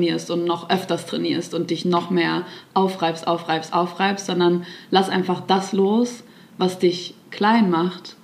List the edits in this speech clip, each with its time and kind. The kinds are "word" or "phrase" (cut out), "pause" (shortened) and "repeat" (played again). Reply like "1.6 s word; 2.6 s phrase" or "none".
none